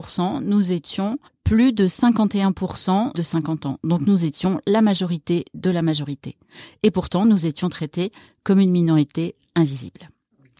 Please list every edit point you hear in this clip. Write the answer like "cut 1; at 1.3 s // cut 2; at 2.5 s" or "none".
cut 1; at 1.2 s // cut 2; at 3.1 s